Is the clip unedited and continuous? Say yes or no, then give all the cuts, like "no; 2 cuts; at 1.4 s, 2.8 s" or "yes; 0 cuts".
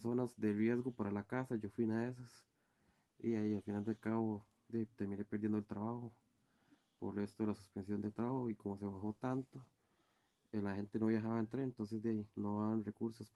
yes; 0 cuts